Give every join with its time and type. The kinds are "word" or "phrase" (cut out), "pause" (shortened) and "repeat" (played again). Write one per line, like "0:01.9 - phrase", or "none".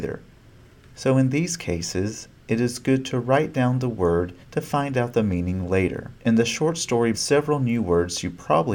0:04.4 - pause
0:06.2 - pause
0:07.1 - phrase